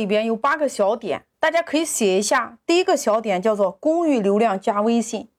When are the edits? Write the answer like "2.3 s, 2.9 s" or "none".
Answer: 1.3 s